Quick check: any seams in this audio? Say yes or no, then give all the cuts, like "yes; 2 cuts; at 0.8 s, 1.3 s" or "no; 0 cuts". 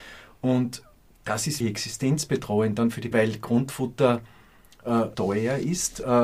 yes; 3 cuts; at 1.6 s, 3.1 s, 5.1 s